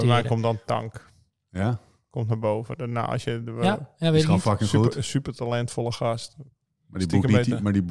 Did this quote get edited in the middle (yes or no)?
no